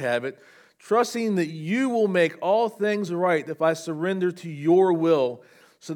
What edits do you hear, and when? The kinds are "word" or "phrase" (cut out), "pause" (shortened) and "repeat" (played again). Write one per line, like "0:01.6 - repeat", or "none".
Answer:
none